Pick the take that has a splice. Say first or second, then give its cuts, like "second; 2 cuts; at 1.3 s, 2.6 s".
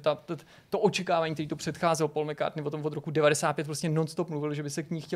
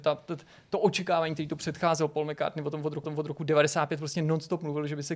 second; 1 cut; at 3.0 s